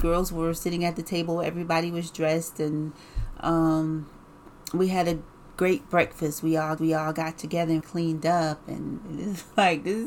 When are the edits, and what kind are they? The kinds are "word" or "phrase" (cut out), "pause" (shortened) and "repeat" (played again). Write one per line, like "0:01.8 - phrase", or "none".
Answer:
0:06.8 - repeat
0:07.8 - word